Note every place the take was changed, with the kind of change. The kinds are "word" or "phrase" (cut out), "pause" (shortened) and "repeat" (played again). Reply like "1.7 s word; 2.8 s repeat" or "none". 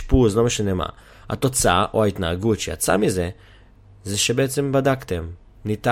none